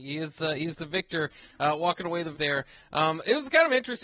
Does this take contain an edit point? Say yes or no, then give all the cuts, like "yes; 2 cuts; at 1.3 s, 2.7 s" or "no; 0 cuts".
yes; 1 cut; at 2.3 s